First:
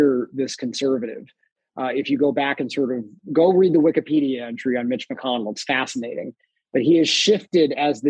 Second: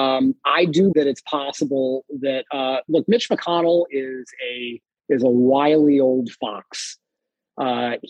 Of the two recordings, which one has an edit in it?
second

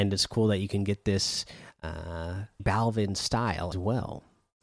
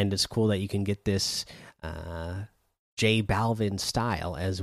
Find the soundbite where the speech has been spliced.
first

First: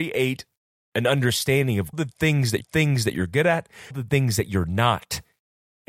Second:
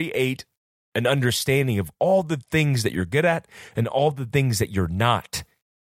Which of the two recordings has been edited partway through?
first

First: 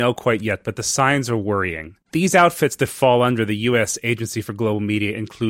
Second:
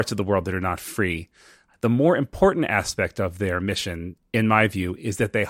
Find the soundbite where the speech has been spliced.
first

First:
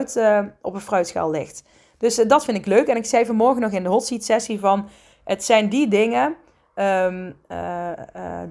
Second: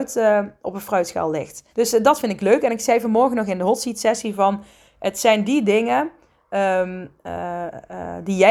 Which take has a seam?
second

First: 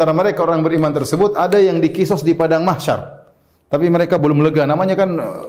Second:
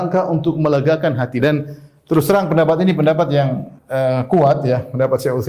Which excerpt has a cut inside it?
second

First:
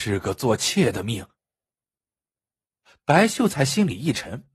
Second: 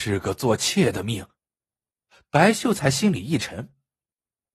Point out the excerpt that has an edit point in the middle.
second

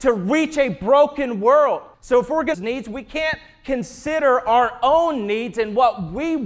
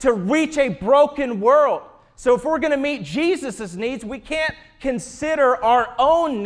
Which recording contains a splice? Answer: first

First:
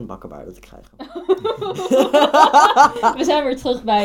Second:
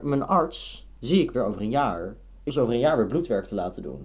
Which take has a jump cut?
second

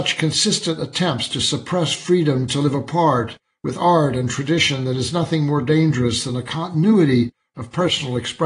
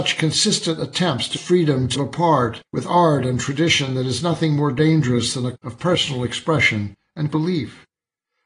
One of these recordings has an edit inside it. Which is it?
second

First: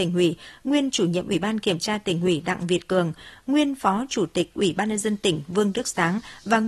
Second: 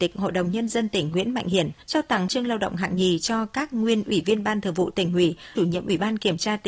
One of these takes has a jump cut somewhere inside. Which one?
second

